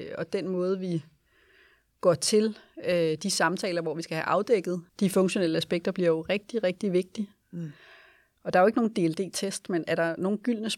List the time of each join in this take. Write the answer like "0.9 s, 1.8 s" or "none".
4.9 s

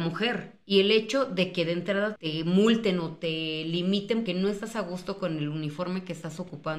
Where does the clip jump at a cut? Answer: 2.2 s, 4.3 s

